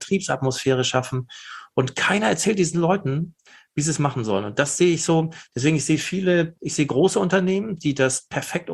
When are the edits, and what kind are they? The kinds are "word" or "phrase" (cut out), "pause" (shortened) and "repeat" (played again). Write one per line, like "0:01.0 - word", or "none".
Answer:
none